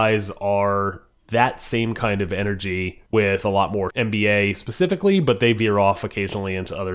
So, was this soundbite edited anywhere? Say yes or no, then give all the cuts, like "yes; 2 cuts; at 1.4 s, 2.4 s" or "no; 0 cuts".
yes; 2 cuts; at 3.1 s, 3.9 s